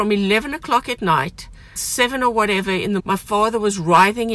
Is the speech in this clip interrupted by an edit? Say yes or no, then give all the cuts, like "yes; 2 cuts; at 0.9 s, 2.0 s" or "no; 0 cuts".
yes; 2 cuts; at 1.8 s, 3.0 s